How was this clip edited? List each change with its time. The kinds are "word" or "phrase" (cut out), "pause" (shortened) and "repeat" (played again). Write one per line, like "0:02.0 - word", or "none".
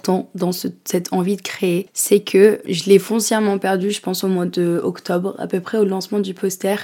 0:02.6 - word